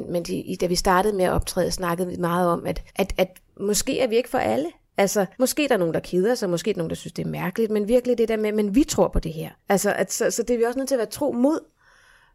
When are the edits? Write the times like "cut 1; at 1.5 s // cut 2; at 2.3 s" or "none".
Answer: cut 1; at 2.9 s // cut 2; at 3.5 s // cut 3; at 5.3 s // cut 4; at 9.6 s